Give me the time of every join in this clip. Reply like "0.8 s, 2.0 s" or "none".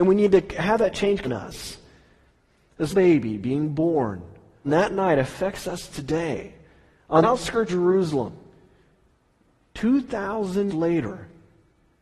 1.2 s, 2.9 s, 4.7 s, 7.2 s, 7.7 s, 10.7 s